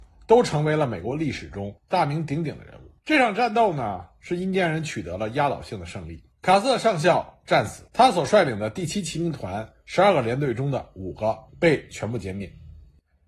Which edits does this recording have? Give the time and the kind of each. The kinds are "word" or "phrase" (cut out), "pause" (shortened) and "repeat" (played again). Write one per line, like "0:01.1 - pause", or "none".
0:01.8 - pause
0:03.0 - pause
0:06.3 - pause
0:07.9 - pause
0:11.5 - pause